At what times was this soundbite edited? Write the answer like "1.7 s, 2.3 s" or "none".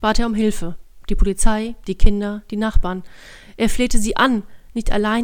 none